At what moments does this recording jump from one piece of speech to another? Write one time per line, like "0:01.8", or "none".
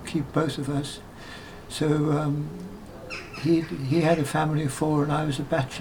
none